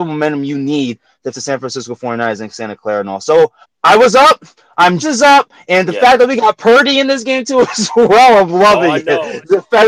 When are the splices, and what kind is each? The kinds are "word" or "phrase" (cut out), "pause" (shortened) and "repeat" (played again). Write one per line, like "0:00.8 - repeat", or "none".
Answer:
0:01.3 - word
0:03.6 - pause
0:05.0 - word